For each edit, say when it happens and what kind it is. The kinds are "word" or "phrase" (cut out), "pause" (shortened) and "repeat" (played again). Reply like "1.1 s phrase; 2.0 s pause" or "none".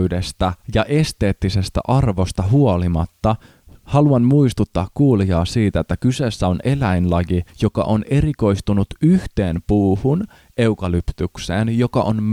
7.5 s pause